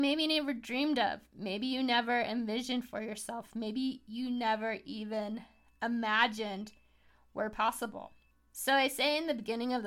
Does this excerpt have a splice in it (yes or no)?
no